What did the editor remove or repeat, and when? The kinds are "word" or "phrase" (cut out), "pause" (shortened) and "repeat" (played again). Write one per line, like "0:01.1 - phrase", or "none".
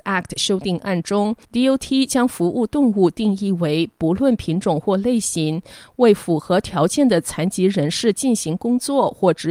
0:01.4 - pause

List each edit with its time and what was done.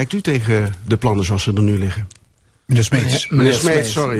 none

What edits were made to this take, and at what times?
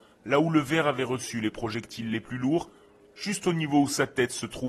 none

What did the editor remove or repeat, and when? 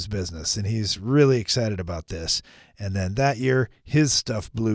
none

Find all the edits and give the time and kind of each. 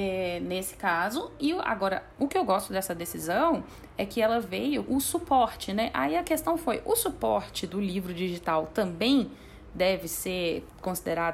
0:01.4 - word
0:04.8 - word

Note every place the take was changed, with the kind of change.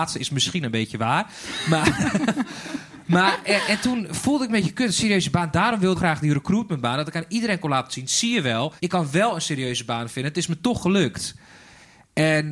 0:04.5 - phrase
0:05.9 - phrase
0:08.8 - pause

